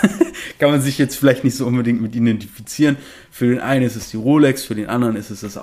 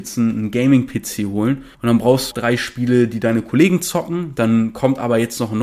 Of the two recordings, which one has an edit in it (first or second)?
second